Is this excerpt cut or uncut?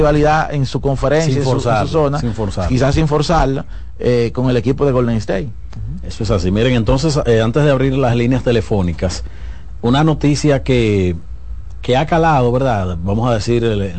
uncut